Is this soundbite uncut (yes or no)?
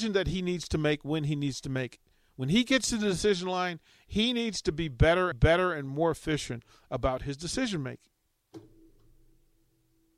no